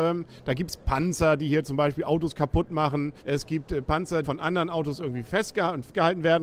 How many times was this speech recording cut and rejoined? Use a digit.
2